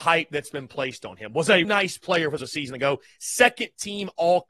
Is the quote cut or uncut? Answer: cut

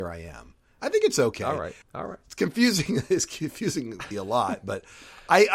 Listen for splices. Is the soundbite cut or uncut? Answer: cut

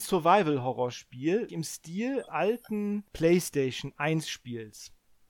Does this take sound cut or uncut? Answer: cut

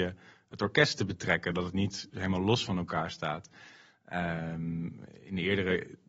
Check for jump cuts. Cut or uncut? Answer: uncut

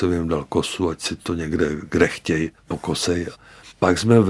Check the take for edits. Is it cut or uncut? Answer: cut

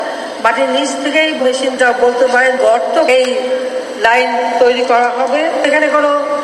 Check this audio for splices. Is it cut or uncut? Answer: cut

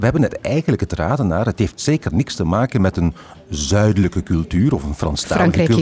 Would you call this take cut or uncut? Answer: uncut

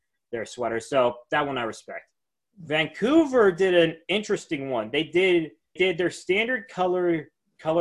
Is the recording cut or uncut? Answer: cut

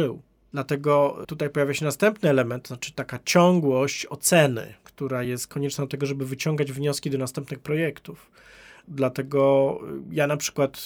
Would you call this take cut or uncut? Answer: uncut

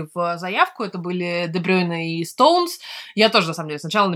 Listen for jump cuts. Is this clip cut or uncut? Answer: uncut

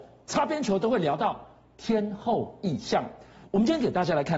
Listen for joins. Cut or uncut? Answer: uncut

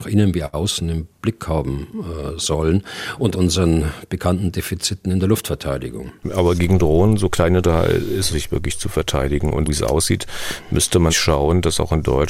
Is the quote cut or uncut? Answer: cut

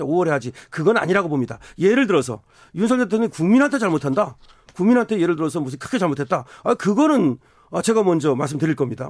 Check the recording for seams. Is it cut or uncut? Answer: uncut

